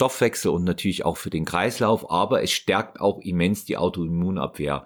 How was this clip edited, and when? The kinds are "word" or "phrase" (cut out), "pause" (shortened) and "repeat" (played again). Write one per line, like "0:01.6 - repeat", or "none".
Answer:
none